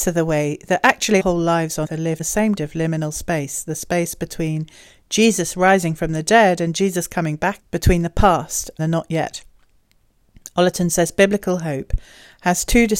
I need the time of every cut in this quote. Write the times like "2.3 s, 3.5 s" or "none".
1.2 s, 1.8 s, 2.2 s, 2.6 s, 7.6 s, 8.8 s